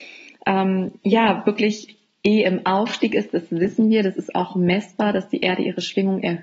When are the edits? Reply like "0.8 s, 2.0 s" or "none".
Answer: 1.0 s